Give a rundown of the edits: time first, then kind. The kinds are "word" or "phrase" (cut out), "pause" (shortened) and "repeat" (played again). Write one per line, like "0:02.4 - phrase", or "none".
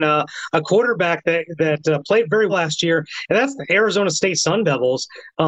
0:02.5 - word